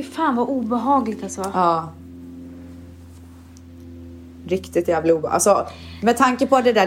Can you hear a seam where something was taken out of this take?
no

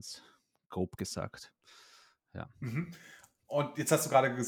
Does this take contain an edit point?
no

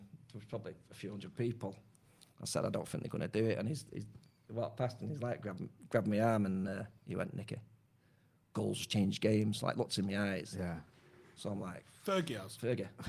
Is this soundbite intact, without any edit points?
yes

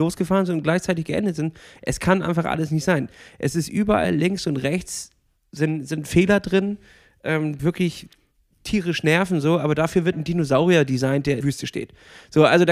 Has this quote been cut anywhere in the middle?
yes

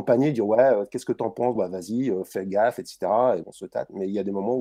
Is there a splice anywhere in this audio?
yes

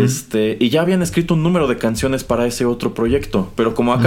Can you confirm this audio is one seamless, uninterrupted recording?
yes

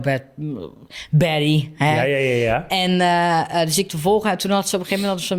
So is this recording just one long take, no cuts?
yes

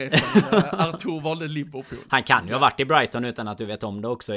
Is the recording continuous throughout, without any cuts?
yes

